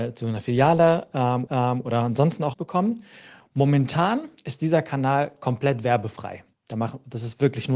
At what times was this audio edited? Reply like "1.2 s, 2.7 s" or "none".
1.5 s, 2.5 s, 6.5 s